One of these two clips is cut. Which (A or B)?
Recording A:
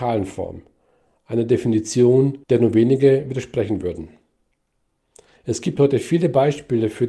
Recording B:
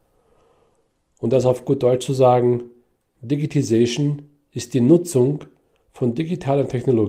A